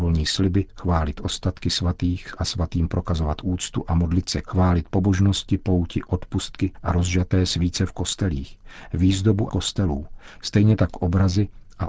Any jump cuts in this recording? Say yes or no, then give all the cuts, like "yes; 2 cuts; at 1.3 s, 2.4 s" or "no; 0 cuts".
yes; 3 cuts; at 4.4 s, 6.7 s, 9.5 s